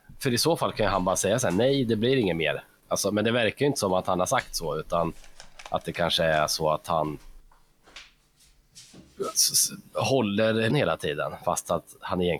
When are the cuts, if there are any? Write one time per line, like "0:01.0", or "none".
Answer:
0:10.7